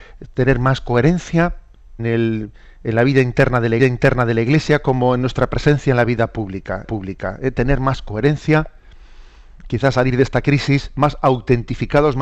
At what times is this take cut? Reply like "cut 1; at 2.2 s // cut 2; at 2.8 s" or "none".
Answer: cut 1; at 2.0 s // cut 2; at 3.8 s // cut 3; at 6.8 s